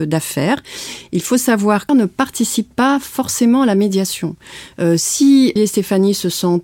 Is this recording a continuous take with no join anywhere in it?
no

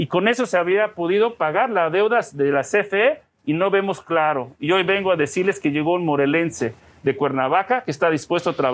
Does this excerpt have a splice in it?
no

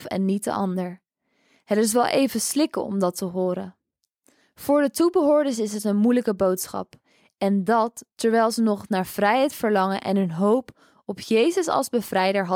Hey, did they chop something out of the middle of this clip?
no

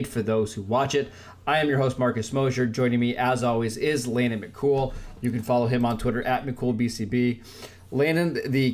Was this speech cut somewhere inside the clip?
no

